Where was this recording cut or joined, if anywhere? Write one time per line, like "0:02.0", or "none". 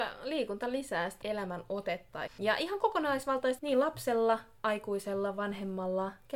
0:01.2
0:02.3
0:03.6
0:04.6